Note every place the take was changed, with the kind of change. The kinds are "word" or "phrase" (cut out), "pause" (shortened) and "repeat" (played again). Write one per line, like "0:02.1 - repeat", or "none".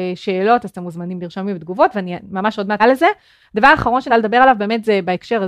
0:02.8 - word
0:04.1 - word